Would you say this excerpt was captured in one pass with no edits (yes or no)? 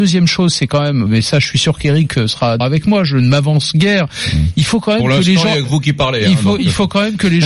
no